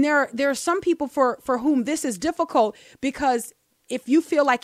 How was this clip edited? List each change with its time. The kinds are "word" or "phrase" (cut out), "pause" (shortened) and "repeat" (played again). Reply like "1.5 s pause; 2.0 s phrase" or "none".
none